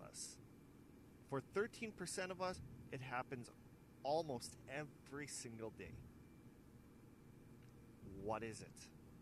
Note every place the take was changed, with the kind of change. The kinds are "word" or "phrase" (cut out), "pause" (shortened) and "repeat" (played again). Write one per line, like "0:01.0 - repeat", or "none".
none